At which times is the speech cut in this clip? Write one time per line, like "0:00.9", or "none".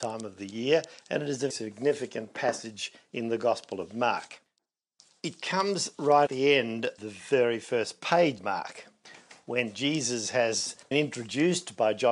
0:01.5
0:06.3
0:07.0
0:08.4
0:10.9